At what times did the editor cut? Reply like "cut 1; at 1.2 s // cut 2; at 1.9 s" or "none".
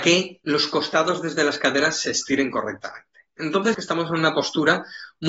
cut 1; at 3.7 s